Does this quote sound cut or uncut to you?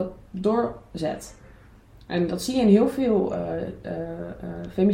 uncut